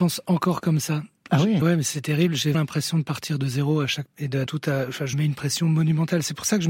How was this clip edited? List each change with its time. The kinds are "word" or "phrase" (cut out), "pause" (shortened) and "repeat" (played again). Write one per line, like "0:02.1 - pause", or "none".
0:01.6 - word
0:02.5 - word
0:04.1 - word
0:04.5 - phrase
0:05.1 - word